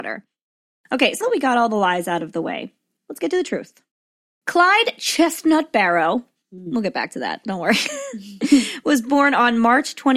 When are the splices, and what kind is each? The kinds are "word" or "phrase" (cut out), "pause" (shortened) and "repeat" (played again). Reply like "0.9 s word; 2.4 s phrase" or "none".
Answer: 1.2 s word